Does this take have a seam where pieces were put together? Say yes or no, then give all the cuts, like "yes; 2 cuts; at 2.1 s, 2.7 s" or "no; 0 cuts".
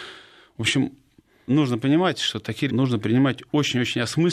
yes; 2 cuts; at 1.5 s, 2.7 s